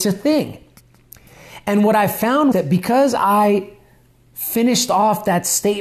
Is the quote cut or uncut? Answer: cut